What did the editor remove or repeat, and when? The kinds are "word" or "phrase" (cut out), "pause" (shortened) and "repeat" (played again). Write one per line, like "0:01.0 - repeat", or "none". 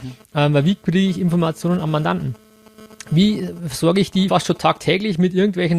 0:04.3 - word